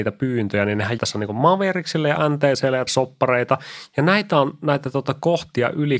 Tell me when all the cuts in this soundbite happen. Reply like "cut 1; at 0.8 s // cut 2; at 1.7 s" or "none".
cut 1; at 1.0 s // cut 2; at 2.9 s